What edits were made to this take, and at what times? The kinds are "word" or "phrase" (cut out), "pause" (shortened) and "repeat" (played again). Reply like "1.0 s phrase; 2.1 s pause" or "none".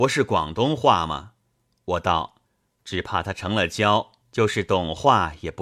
1.4 s pause; 2.4 s pause; 4.2 s pause